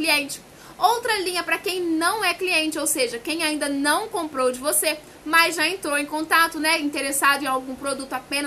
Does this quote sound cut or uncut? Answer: uncut